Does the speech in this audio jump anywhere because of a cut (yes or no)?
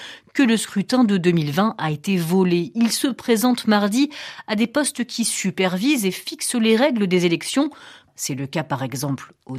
no